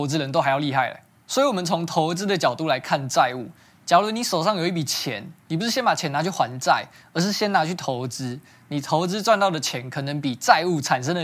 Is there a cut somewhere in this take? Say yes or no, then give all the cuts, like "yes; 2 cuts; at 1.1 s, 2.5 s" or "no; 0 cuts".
no; 0 cuts